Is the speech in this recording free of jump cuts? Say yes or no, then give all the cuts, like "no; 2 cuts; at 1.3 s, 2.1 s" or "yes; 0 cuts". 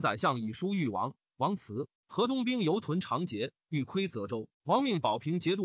no; 2 cuts; at 2.0 s, 4.5 s